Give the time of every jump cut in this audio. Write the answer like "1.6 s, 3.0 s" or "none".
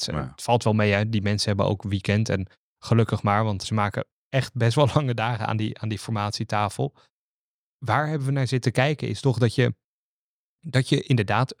3.6 s